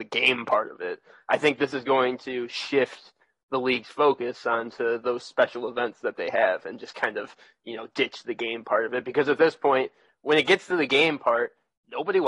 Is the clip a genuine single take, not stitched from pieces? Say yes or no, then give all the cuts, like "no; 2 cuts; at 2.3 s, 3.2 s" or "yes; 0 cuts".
yes; 0 cuts